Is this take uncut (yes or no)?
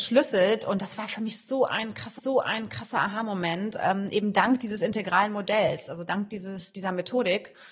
no